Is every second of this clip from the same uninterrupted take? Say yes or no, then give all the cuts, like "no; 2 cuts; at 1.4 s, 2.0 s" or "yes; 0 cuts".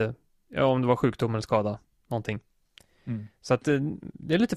yes; 0 cuts